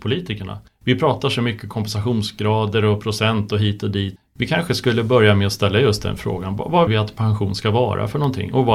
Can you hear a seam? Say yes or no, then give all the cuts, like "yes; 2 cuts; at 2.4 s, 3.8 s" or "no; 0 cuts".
yes; 1 cut; at 6.9 s